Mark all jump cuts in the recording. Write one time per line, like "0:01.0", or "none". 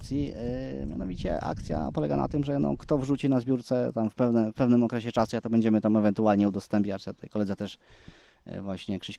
none